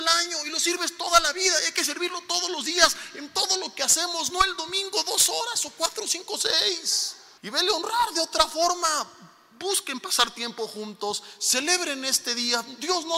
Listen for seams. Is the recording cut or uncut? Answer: cut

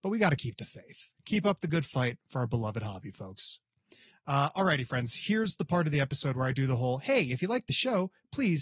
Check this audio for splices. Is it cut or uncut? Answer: uncut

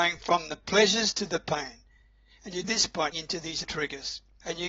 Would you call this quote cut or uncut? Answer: cut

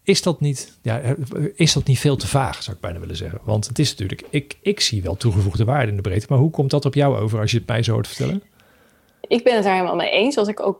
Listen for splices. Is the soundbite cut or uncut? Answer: uncut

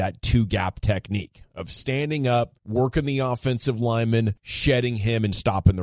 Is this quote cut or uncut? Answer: cut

